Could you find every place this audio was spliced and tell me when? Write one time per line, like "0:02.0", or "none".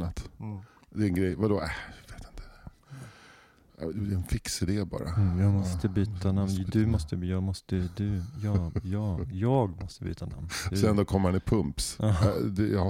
none